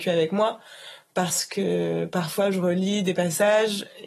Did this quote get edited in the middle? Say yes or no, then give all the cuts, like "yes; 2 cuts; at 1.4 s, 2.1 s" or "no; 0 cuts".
no; 0 cuts